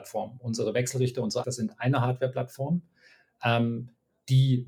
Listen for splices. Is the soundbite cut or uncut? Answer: cut